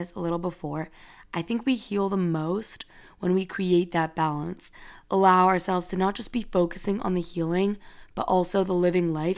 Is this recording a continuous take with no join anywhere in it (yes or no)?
yes